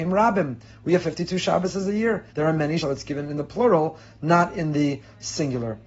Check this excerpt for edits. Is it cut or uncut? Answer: cut